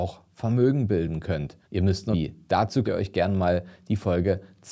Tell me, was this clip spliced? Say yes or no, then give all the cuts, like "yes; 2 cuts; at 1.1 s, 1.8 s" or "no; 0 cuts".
yes; 3 cuts; at 1.6 s, 2.1 s, 2.8 s